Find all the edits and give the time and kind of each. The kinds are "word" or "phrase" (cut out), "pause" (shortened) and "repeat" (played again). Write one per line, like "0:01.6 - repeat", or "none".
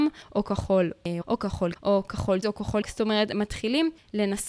0:01.2 - word
0:01.8 - word
0:02.4 - word
0:02.8 - word